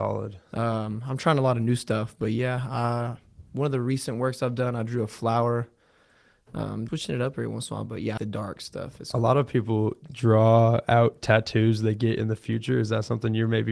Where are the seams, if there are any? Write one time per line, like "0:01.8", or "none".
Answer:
0:06.9
0:08.2